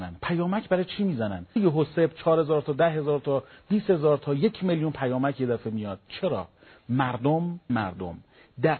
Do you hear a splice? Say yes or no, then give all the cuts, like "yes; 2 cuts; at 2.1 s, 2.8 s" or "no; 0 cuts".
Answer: yes; 2 cuts; at 1.6 s, 7.7 s